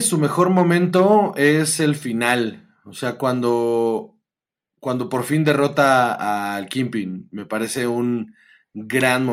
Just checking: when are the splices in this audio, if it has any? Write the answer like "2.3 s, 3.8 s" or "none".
none